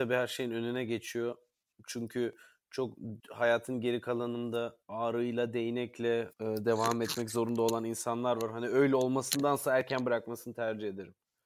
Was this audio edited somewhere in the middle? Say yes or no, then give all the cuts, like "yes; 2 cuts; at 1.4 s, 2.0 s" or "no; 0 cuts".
yes; 4 cuts; at 1.7 s, 3.2 s, 4.8 s, 6.3 s